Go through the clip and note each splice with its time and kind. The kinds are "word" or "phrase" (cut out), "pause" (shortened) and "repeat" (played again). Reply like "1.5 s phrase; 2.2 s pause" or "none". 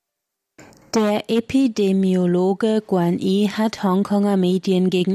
none